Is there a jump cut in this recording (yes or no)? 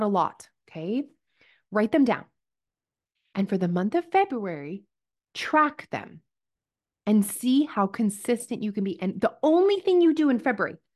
no